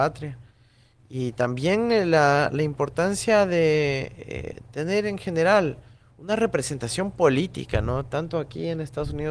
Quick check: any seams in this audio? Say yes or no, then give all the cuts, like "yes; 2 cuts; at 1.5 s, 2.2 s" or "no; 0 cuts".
no; 0 cuts